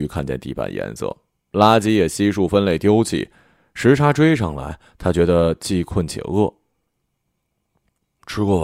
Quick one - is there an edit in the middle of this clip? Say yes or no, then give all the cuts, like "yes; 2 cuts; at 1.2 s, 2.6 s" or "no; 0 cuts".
no; 0 cuts